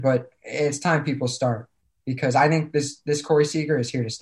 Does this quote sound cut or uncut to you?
uncut